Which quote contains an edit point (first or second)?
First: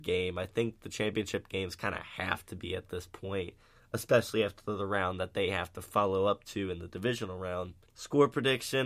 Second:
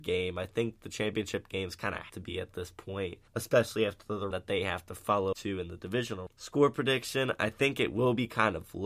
second